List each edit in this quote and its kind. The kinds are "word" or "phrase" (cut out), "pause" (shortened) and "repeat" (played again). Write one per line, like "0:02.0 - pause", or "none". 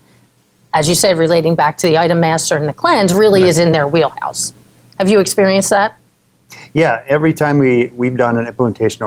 none